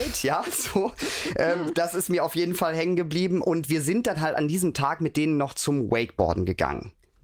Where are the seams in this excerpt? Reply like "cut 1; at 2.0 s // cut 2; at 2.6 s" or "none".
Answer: none